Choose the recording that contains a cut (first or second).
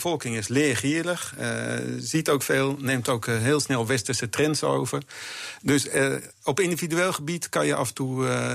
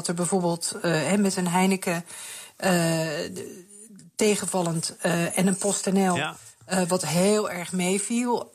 first